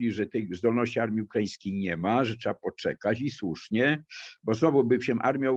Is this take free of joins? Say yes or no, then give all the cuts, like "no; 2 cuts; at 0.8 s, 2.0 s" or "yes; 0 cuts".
yes; 0 cuts